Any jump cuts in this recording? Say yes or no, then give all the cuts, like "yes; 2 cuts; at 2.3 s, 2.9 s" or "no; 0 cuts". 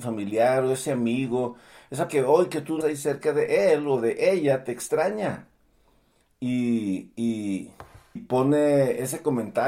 yes; 3 cuts; at 2.1 s, 2.8 s, 8.2 s